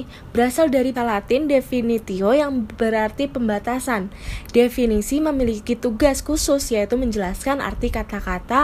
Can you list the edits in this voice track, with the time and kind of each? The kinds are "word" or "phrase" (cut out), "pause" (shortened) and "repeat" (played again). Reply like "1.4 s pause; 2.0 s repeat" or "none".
0.9 s word